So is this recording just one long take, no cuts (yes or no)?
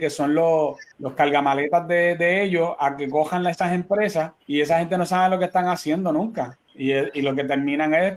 no